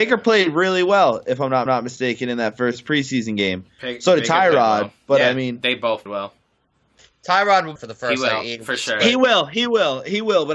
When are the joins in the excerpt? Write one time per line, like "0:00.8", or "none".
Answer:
0:01.7
0:06.1
0:07.8